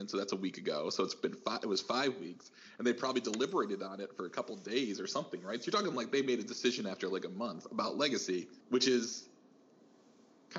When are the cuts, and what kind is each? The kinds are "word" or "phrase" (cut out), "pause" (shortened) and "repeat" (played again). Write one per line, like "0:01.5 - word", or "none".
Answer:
0:08.6 - pause